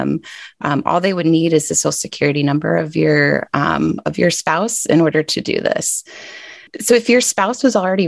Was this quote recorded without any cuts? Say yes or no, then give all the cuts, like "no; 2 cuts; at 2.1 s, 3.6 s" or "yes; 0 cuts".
yes; 0 cuts